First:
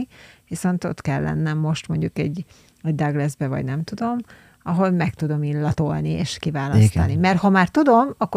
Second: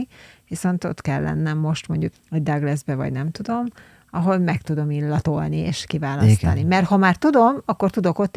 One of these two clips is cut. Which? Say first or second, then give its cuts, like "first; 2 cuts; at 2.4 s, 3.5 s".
second; 1 cut; at 2.1 s